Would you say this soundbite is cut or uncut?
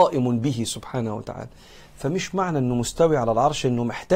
uncut